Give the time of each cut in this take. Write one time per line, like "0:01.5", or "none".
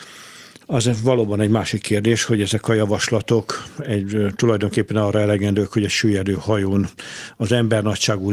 none